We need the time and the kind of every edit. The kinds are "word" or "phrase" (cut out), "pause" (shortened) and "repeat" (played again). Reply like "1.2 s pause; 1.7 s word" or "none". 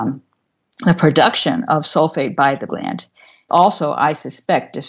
2.7 s word; 3.5 s word